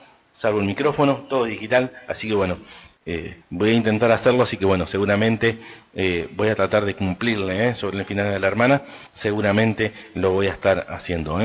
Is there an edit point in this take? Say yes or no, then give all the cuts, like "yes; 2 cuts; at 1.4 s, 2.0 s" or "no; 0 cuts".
yes; 2 cuts; at 3.4 s, 9.1 s